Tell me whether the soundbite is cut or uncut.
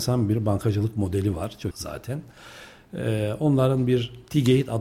cut